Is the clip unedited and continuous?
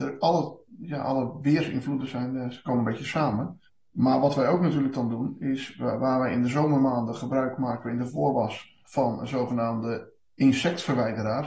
no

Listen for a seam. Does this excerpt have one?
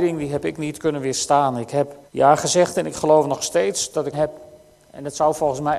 yes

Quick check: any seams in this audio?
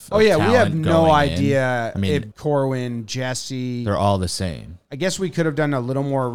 yes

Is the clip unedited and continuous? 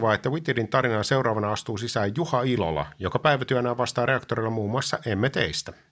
yes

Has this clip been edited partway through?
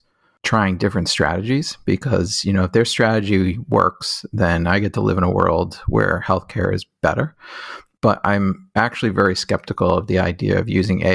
no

